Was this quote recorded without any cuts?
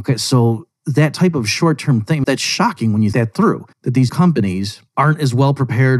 no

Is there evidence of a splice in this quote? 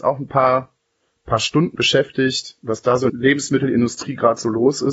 yes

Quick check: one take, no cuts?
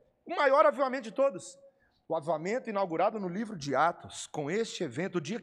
yes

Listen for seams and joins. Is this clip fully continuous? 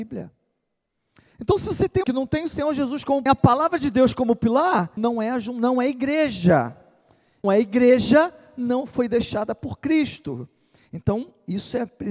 no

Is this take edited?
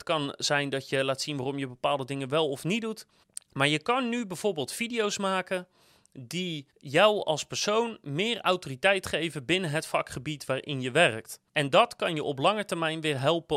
yes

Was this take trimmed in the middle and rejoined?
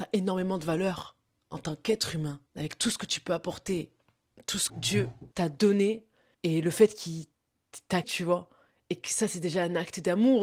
yes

